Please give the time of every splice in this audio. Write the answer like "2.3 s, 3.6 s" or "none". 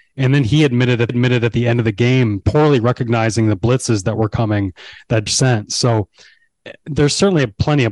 1.1 s, 2.4 s, 5.3 s

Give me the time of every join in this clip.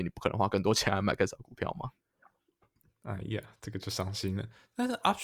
none

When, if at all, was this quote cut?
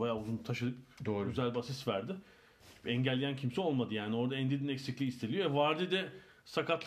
none

